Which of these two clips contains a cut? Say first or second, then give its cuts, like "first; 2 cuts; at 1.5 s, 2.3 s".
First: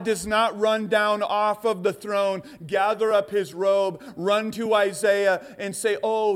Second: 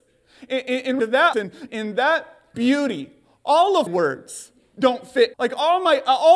second; 6 cuts; at 1.0 s, 1.3 s, 1.7 s, 2.5 s, 3.9 s, 5.3 s